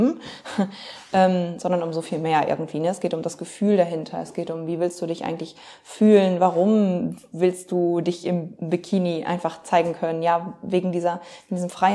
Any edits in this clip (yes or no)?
no